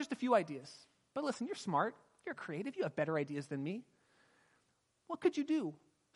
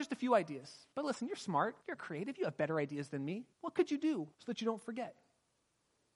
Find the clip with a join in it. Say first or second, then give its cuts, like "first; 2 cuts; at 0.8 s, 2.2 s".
second; 4 cuts; at 0.9 s, 1.8 s, 3.5 s, 4.3 s